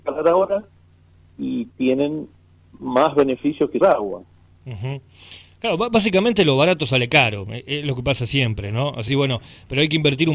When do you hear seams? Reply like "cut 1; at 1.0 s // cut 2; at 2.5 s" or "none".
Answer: cut 1; at 3.8 s // cut 2; at 9.1 s

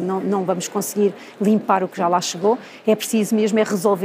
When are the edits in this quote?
none

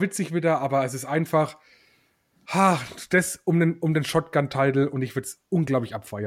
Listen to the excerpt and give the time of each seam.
none

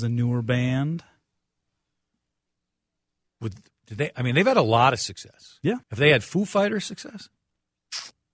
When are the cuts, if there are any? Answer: cut 1; at 5.8 s

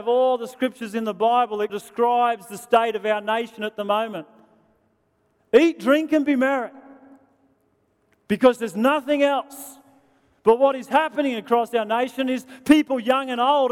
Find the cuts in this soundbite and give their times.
cut 1; at 1.7 s

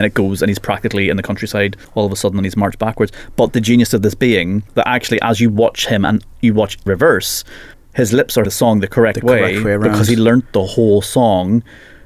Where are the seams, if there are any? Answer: cut 1; at 1.8 s // cut 2; at 4.7 s // cut 3; at 6.9 s // cut 4; at 7.7 s // cut 5; at 8.5 s

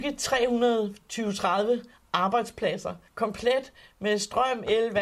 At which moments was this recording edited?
cut 1; at 3.1 s

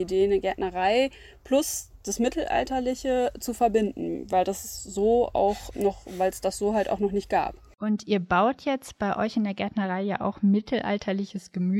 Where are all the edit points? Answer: cut 1; at 5.7 s

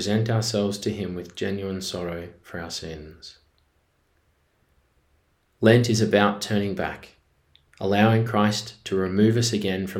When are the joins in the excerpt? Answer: none

